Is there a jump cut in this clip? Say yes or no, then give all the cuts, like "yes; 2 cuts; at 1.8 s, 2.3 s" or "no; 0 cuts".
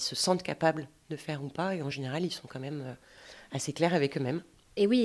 no; 0 cuts